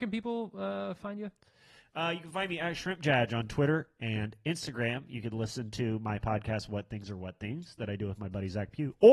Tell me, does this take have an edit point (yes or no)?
no